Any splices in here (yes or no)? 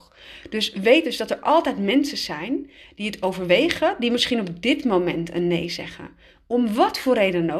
no